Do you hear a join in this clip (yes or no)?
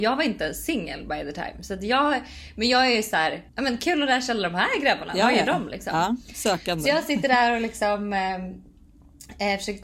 yes